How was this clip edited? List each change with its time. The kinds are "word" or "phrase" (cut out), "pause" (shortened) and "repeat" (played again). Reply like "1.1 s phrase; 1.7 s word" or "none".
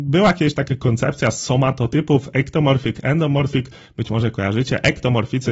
none